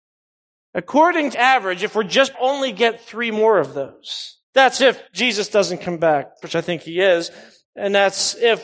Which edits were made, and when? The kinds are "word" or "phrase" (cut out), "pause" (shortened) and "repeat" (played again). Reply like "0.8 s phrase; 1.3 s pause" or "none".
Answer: 1.3 s word; 2.3 s phrase; 4.4 s pause; 5.1 s pause; 6.4 s word